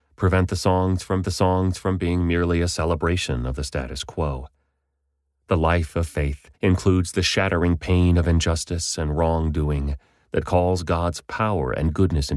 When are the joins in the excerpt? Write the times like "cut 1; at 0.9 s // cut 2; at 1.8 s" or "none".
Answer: cut 1; at 1.2 s // cut 2; at 6.5 s

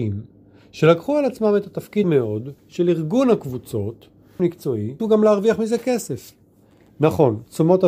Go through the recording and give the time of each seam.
cut 1; at 2.0 s // cut 2; at 2.6 s // cut 3; at 4.4 s // cut 4; at 5.0 s

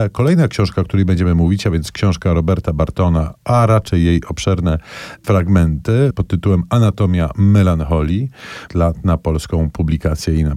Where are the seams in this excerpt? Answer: cut 1; at 6.1 s // cut 2; at 8.7 s

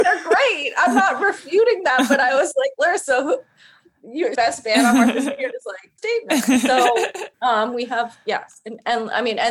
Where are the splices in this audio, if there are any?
cut 1; at 4.3 s // cut 2; at 6.0 s // cut 3; at 7.3 s

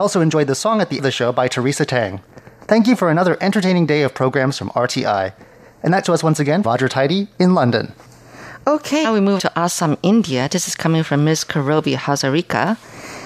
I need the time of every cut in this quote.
cut 1; at 1.0 s // cut 2; at 6.0 s // cut 3; at 6.6 s // cut 4; at 9.0 s // cut 5; at 9.4 s

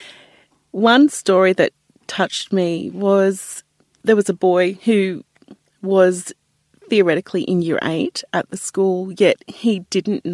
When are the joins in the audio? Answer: none

